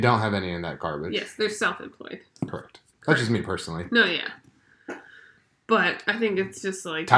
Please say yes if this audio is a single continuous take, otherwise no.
yes